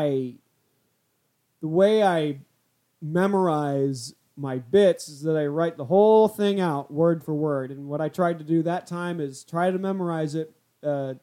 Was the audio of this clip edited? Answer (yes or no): no